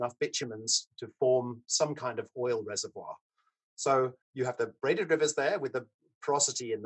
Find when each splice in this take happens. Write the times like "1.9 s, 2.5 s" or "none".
4.2 s